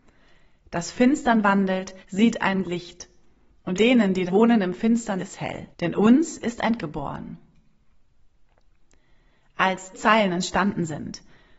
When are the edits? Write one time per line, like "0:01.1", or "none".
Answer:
0:00.9
0:02.0
0:02.6
0:03.7
0:04.3
0:05.2
0:05.7
0:06.8
0:09.9